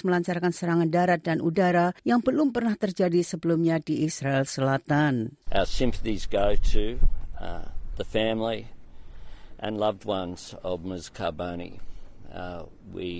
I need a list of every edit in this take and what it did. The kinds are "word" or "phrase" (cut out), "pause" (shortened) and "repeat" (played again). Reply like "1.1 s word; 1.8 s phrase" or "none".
2.0 s pause